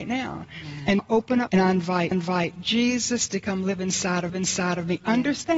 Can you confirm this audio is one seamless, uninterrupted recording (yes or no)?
no